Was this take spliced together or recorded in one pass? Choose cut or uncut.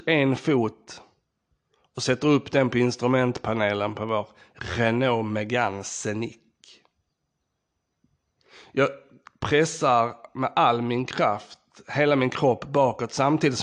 uncut